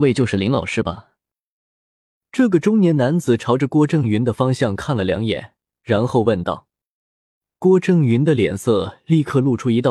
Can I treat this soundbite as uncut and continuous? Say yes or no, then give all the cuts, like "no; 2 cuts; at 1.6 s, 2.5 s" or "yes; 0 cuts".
yes; 0 cuts